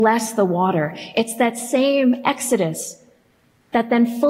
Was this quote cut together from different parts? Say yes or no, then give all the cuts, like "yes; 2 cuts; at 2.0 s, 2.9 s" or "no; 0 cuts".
no; 0 cuts